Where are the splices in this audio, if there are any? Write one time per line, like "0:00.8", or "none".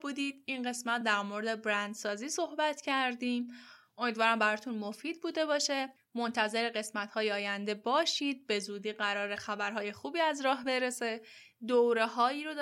none

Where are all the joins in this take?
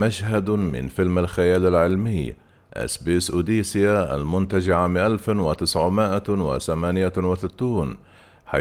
none

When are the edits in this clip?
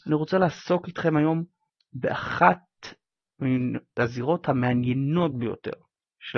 none

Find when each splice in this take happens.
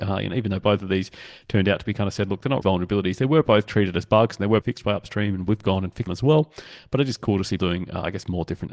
0:02.6
0:04.6
0:06.1
0:07.6

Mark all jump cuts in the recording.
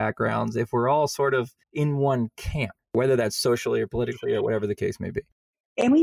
0:01.6

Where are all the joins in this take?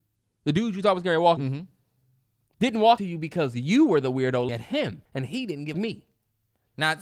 0:01.4
0:03.0
0:04.5
0:05.1
0:05.7

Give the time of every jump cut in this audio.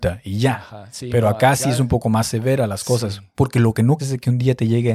0:04.0

